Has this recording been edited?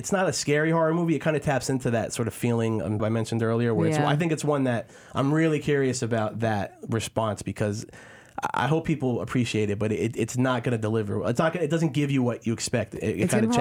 yes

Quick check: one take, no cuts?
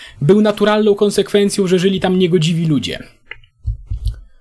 yes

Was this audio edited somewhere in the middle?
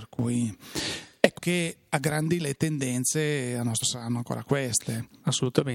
yes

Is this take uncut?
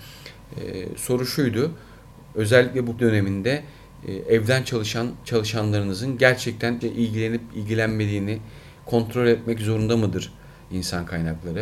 no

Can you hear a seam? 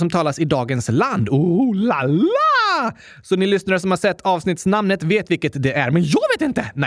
no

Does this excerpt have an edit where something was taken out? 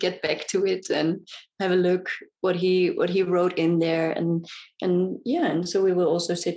no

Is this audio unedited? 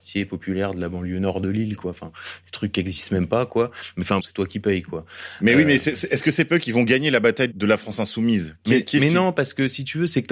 no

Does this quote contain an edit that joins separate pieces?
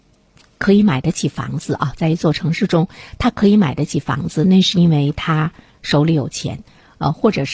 no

